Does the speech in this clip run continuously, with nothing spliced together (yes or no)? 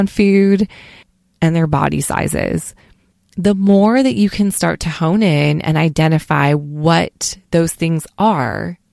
yes